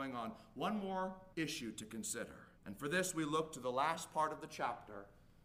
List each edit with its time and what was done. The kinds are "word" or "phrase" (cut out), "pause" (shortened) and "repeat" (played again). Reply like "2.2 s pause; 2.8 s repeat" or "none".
1.3 s pause; 2.6 s pause